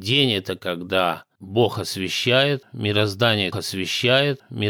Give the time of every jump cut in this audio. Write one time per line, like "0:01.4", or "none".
0:03.5